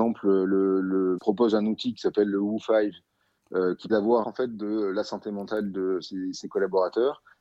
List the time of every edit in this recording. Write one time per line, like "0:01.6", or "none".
0:01.2
0:03.9
0:04.2